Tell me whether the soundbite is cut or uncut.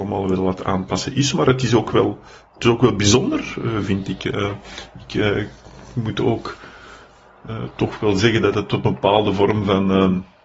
uncut